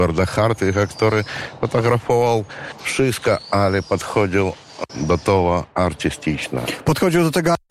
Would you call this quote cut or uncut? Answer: cut